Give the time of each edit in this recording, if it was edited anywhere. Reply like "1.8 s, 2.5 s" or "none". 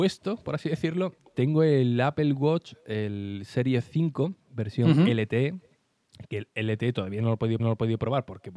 1.3 s, 7.6 s